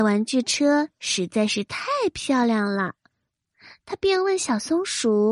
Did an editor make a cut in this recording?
no; 0 cuts

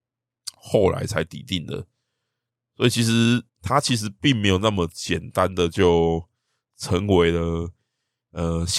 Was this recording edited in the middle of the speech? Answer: yes; 1 cut; at 3.5 s

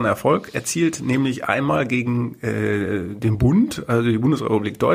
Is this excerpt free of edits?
yes; 0 cuts

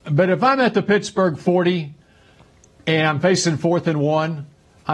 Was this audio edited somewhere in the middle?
no; 0 cuts

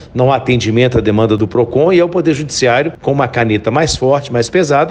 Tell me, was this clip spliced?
no; 0 cuts

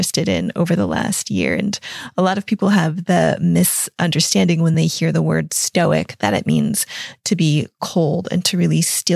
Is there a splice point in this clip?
no; 0 cuts

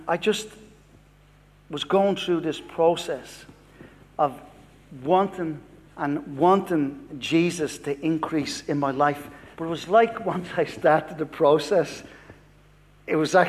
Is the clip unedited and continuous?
no; 2 cuts; at 5.9 s, 9.5 s

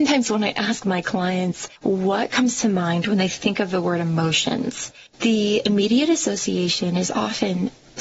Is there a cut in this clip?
yes; 2 cuts; at 1.8 s, 5.1 s

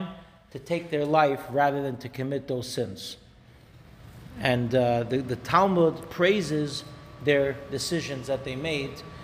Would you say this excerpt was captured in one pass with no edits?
yes; 0 cuts

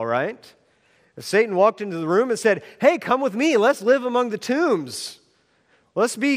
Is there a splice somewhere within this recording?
no; 0 cuts

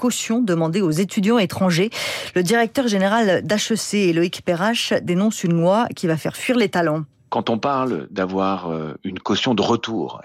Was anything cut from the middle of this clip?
no; 0 cuts

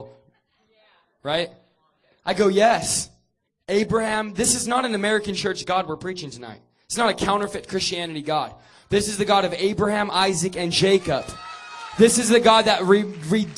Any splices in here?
no; 0 cuts

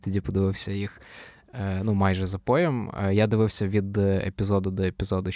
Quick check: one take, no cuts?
yes; 0 cuts

